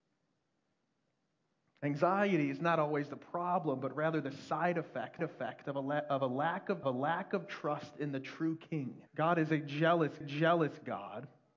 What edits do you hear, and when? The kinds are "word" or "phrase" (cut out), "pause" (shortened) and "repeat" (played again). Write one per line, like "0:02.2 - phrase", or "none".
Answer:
0:05.2 - repeat
0:06.8 - repeat
0:09.1 - pause
0:10.2 - repeat